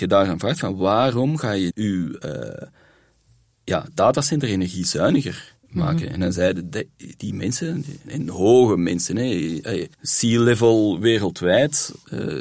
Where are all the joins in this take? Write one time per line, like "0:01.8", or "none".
0:01.7
0:05.6
0:08.1
0:09.9